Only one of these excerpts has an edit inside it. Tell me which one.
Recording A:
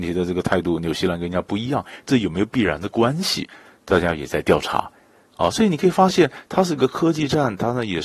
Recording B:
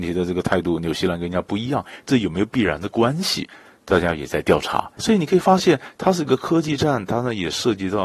B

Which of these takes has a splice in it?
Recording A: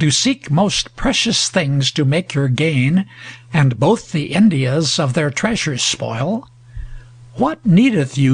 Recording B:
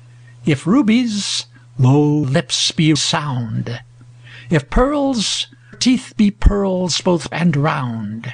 B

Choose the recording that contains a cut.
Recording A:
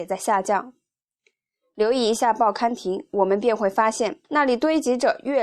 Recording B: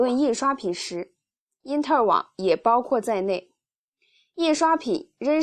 A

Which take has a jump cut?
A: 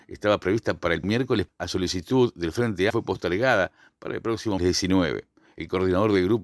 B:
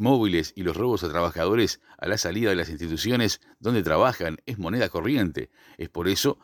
A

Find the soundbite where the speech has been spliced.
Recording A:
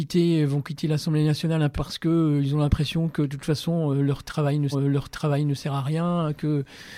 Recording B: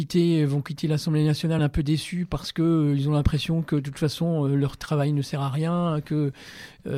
A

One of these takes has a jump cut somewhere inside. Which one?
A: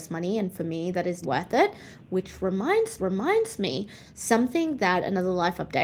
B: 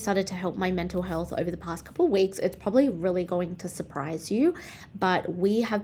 A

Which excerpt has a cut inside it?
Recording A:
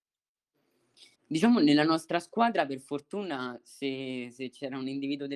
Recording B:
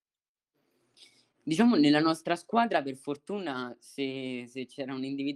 A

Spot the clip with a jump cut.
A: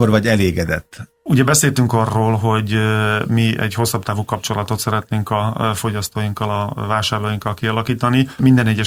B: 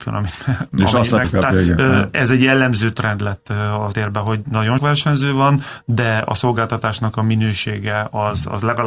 B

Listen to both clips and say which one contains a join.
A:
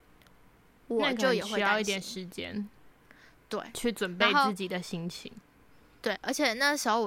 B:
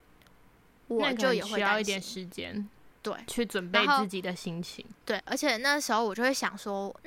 B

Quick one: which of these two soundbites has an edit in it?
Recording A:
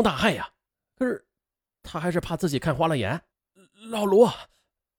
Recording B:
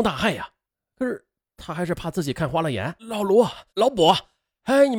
B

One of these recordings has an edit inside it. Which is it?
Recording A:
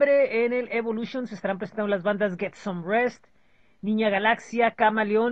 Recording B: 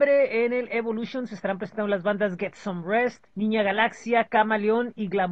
B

